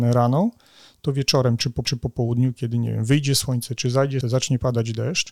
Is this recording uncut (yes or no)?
no